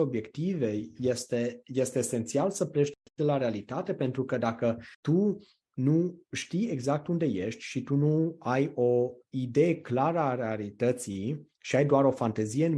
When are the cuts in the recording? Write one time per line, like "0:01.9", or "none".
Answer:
0:04.9